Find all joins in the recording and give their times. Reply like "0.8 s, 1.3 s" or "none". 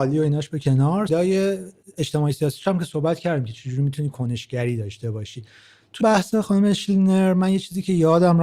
1.1 s, 6.0 s